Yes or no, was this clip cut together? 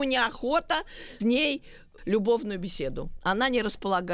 yes